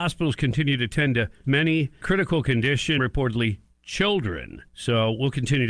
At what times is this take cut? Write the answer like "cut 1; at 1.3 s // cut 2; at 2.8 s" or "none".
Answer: cut 1; at 1.4 s // cut 2; at 2.0 s // cut 3; at 3.0 s // cut 4; at 4.7 s